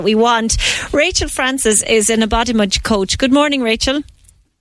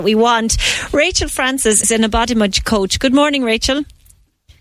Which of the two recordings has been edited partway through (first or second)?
second